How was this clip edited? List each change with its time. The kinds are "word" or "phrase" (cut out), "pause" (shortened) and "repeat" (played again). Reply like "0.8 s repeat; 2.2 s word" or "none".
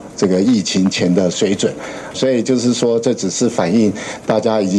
2.1 s word